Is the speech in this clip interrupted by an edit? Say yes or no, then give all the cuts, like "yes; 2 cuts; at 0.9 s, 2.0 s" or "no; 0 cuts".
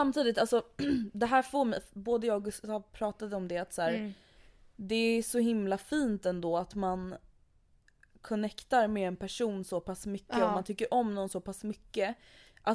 no; 0 cuts